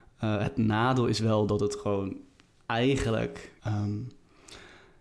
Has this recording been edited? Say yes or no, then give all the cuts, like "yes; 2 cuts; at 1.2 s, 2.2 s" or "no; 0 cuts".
yes; 1 cut; at 3.6 s